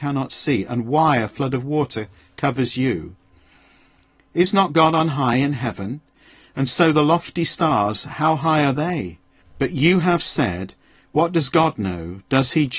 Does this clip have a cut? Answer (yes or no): no